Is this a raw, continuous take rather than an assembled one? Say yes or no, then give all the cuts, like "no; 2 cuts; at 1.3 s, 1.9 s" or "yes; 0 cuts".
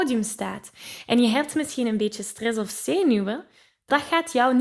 yes; 0 cuts